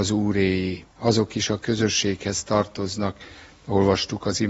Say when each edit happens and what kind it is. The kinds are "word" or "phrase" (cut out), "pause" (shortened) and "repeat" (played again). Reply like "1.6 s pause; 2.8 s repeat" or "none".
0.9 s pause